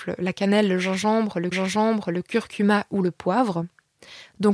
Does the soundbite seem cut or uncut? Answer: cut